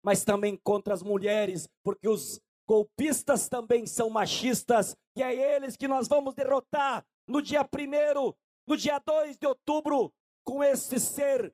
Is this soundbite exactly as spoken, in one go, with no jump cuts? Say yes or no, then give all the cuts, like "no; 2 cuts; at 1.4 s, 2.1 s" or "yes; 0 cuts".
yes; 0 cuts